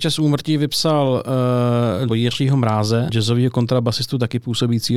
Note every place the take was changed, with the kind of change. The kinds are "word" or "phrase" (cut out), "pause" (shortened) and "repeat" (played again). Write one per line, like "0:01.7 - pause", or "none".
0:02.1 - phrase
0:03.1 - word